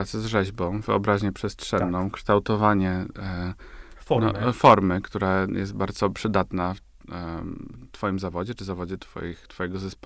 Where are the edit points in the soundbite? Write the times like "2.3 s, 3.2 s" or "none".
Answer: none